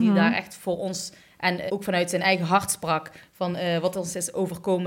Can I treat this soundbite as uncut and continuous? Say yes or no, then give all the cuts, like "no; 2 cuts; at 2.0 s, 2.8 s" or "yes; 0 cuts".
no; 1 cut; at 1.7 s